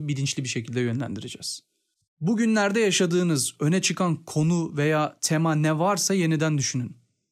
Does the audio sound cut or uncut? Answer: uncut